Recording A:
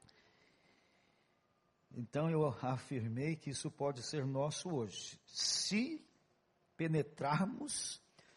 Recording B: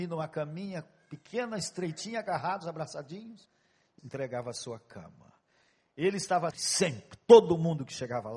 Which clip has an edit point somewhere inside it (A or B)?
B